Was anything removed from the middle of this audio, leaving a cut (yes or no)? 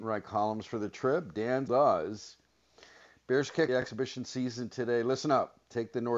yes